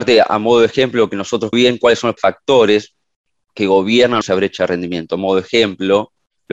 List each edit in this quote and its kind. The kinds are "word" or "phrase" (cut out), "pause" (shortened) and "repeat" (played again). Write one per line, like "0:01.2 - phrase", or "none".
0:01.5 - phrase
0:02.2 - word
0:04.2 - phrase